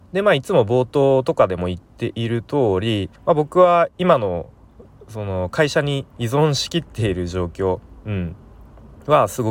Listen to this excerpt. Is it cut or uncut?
cut